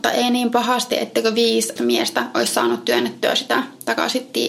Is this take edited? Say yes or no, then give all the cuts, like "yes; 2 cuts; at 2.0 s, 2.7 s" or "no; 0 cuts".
yes; 1 cut; at 1.8 s